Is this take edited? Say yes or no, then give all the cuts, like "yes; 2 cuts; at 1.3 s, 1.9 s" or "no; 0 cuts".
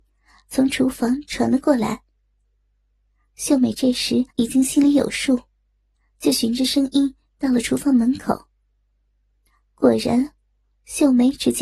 yes; 1 cut; at 4.3 s